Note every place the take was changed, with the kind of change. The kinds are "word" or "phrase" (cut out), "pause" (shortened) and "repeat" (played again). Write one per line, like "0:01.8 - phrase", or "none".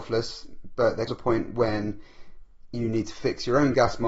0:01.1 - word

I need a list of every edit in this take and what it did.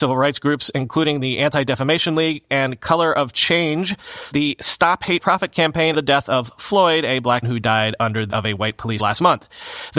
0:02.5 - word
0:04.3 - word
0:05.2 - word
0:05.9 - word
0:07.4 - word
0:08.3 - word
0:09.0 - word

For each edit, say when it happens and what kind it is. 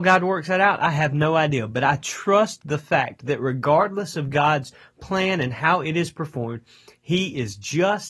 none

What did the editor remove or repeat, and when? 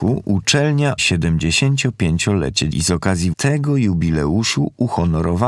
0:01.0 - word
0:02.7 - word
0:03.3 - word

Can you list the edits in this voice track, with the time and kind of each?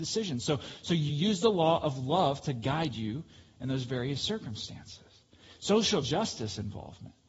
none

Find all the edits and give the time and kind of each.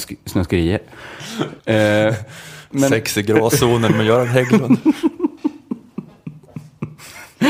0:01.6 - pause

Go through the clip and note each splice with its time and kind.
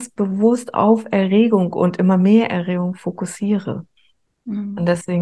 none

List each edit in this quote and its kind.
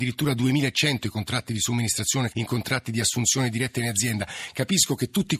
0:02.3 - phrase

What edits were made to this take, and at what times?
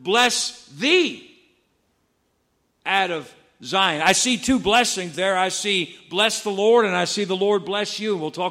none

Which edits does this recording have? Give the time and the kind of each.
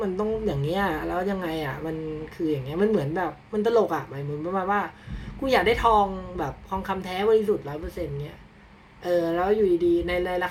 none

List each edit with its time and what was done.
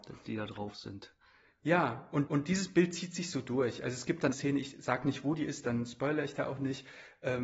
0:02.3 - repeat
0:04.3 - phrase

